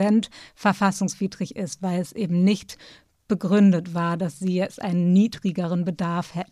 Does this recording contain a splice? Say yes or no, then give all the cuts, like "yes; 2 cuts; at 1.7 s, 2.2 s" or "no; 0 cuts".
no; 0 cuts